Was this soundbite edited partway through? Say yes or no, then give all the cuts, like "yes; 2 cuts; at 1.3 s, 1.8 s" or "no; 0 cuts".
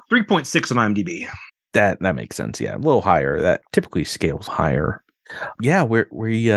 yes; 1 cut; at 4.5 s